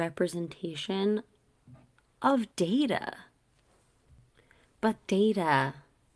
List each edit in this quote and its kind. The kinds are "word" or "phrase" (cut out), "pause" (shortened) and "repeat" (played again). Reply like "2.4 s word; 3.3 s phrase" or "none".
2.5 s pause; 5.0 s word